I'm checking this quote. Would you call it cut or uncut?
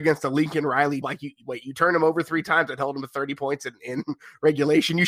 cut